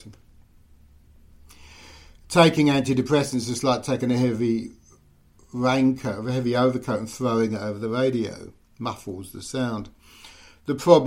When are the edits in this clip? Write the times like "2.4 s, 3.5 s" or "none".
none